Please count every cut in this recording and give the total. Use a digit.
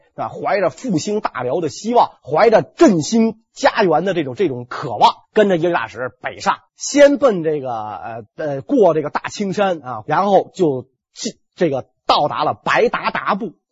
4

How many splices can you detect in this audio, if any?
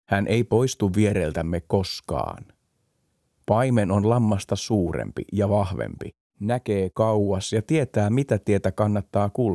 0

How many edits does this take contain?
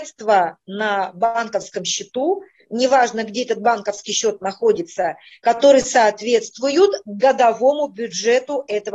0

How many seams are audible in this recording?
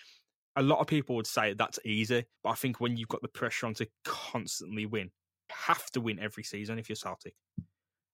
2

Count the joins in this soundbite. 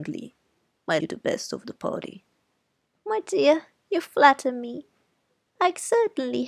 1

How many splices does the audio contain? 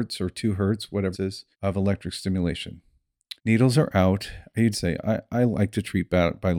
4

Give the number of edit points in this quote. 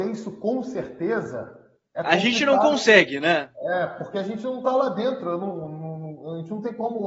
0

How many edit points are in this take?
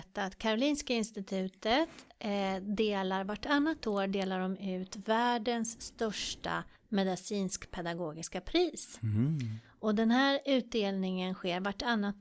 1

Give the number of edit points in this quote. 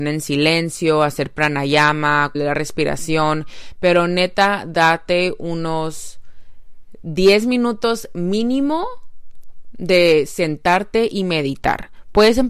1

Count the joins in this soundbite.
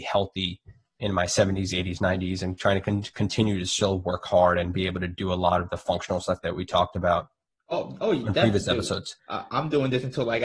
1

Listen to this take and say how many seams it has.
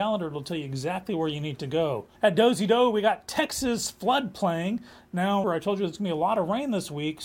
2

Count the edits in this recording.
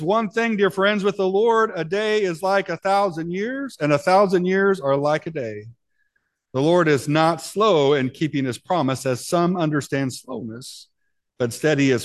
0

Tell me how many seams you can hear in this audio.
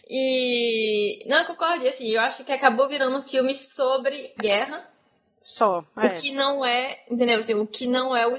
1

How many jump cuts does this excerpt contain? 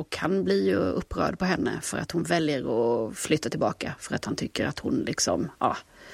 0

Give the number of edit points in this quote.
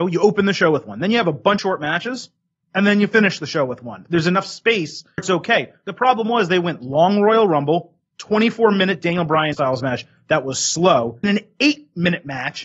4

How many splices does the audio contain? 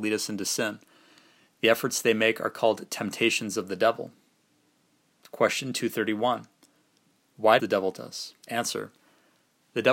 3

